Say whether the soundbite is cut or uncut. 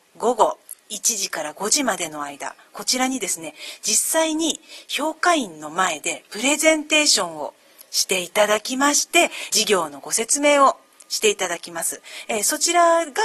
uncut